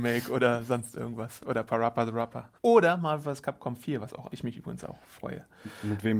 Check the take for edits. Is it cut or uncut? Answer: cut